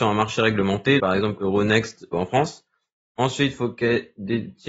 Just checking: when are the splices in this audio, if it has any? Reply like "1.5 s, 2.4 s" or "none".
1.0 s, 1.4 s, 2.1 s